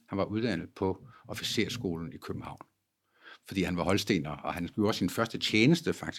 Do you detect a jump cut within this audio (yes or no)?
no